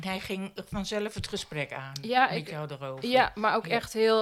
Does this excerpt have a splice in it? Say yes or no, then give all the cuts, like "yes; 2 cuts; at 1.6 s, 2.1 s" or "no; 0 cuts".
no; 0 cuts